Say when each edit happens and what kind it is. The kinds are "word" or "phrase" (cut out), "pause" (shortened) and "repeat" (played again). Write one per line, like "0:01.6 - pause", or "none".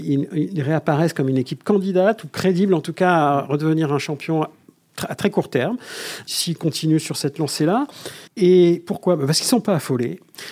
0:08.3 - pause